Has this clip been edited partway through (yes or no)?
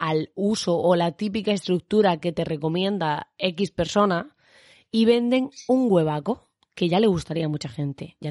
no